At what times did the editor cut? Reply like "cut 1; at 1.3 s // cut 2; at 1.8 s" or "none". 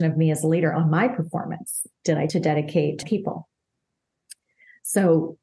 cut 1; at 1.9 s // cut 2; at 2.3 s // cut 3; at 3.0 s